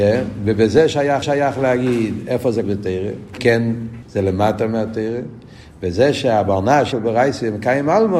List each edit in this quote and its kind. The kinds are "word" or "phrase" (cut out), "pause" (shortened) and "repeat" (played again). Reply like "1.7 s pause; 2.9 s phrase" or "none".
1.2 s repeat; 2.6 s word; 3.4 s word; 4.0 s phrase; 6.9 s word